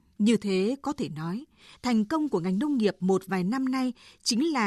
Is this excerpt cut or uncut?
uncut